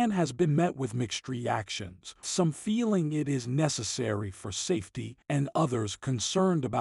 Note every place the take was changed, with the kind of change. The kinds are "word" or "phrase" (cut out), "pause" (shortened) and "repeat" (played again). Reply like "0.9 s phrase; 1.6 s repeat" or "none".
2.2 s word; 5.2 s pause